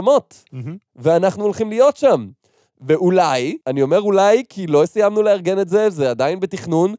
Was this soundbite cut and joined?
yes; 1 cut; at 3.6 s

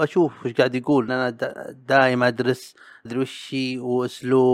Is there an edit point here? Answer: yes; 2 cuts; at 1.1 s, 3.1 s

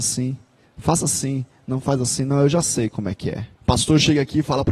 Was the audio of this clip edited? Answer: yes; 1 cut; at 3.6 s

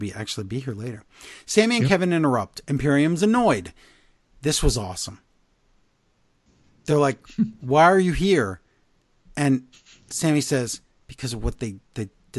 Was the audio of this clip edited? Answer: no; 0 cuts

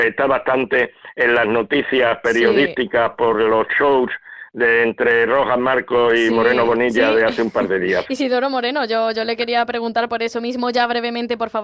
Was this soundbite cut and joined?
no; 0 cuts

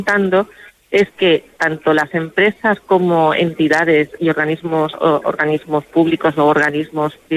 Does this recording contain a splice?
no; 0 cuts

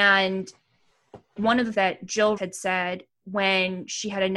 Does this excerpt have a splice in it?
yes; 3 cuts; at 1.4 s, 1.7 s, 2.4 s

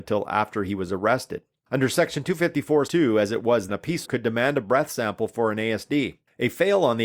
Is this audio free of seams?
no; 3 cuts; at 2.9 s, 3.7 s, 4.0 s

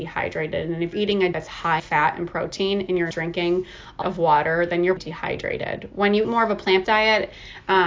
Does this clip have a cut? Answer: yes; 8 cuts; at 0.9 s, 1.3 s, 1.8 s, 3.1 s, 4.0 s, 5.0 s, 6.2 s, 6.8 s

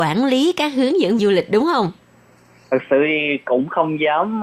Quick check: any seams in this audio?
yes; 1 cut; at 1.2 s

